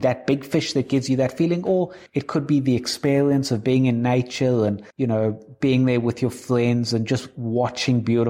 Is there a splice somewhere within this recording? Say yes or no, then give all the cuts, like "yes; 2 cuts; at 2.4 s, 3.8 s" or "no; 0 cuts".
yes; 2 cuts; at 2.1 s, 4.9 s